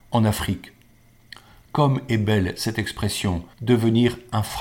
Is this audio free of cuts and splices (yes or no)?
no